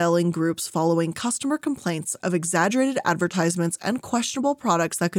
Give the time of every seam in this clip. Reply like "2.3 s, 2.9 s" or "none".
none